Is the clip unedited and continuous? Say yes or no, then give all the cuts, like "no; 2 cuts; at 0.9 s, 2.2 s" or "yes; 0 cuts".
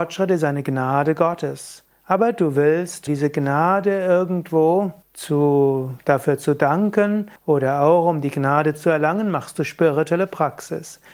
no; 3 cuts; at 3.1 s, 5.0 s, 7.4 s